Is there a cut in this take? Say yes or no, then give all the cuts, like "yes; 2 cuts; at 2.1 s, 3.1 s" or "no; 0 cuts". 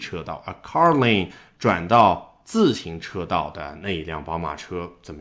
no; 0 cuts